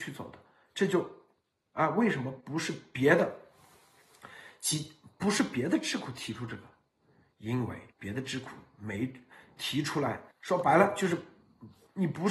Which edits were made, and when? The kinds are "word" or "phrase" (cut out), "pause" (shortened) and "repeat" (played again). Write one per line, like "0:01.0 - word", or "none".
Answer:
0:07.9 - pause
0:10.3 - pause